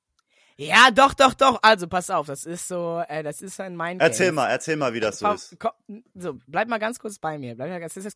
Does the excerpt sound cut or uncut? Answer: uncut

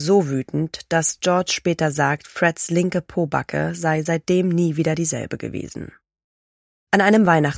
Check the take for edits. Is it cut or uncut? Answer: uncut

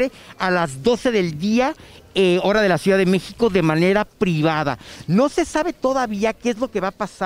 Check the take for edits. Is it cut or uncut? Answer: uncut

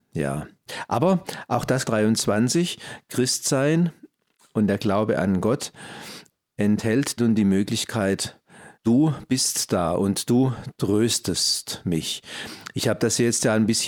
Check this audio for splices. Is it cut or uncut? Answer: cut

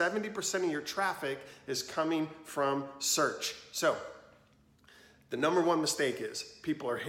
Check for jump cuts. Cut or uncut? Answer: uncut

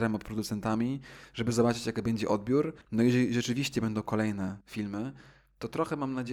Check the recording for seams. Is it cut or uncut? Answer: cut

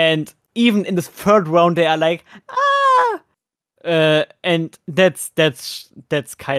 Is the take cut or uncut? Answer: uncut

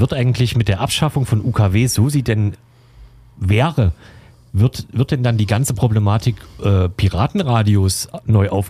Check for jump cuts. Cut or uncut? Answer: uncut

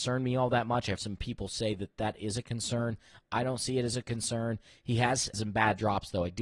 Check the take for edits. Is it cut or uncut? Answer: cut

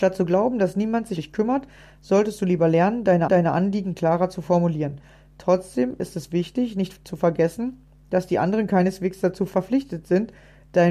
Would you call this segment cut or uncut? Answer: cut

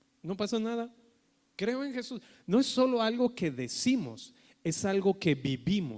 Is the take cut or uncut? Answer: uncut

